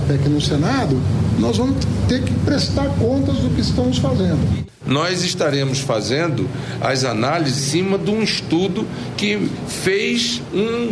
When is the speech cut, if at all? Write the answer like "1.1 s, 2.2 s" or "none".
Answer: 7.6 s